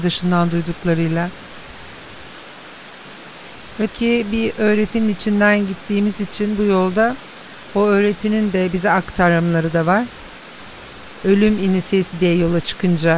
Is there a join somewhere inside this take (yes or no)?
yes